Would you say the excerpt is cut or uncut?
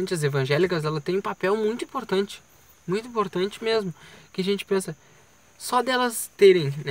uncut